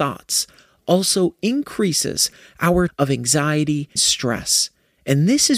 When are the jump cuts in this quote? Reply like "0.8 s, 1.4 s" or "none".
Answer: 2.9 s, 4.0 s

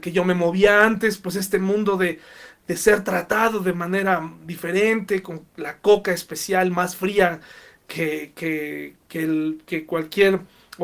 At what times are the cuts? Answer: none

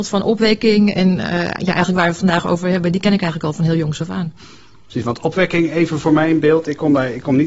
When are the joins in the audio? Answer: none

